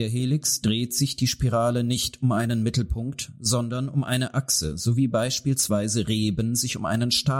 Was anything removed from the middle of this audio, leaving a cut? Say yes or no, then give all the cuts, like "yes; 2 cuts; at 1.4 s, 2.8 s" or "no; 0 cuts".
no; 0 cuts